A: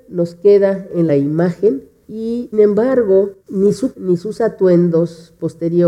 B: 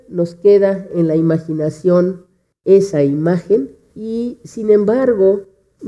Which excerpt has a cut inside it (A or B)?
A